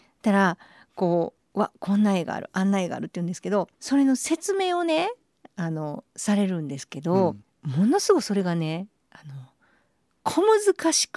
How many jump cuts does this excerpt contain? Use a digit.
2